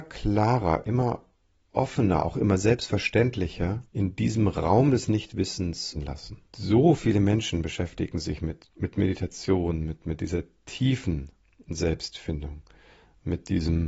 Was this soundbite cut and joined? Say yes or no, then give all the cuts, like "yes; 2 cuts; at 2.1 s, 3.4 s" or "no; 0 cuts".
yes; 4 cuts; at 3.9 s, 5.9 s, 6.5 s, 8.6 s